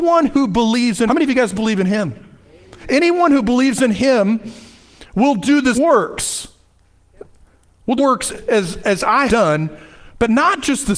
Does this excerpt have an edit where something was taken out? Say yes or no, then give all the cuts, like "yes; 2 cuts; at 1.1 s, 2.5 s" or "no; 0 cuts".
yes; 5 cuts; at 1.1 s, 5.7 s, 8.0 s, 8.3 s, 9.3 s